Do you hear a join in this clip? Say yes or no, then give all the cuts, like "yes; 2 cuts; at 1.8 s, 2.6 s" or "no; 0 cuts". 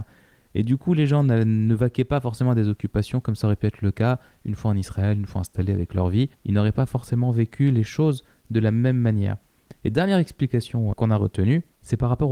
yes; 2 cuts; at 6.3 s, 10.9 s